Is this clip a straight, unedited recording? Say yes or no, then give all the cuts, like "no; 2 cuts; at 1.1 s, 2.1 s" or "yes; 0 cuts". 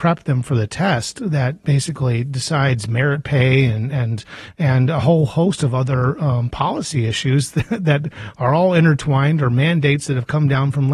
yes; 0 cuts